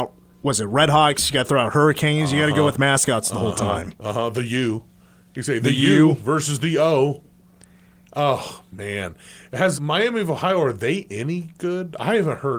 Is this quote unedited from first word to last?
no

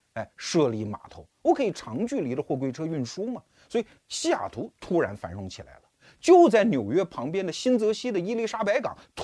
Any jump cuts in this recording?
no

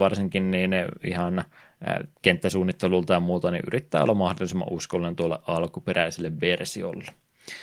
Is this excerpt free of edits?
no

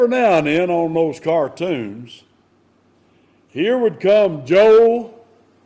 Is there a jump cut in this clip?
no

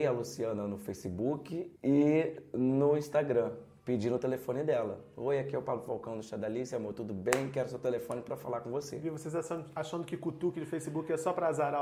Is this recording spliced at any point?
yes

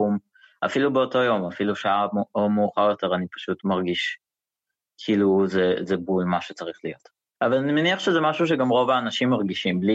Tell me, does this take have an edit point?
no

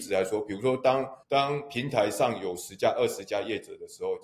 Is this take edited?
yes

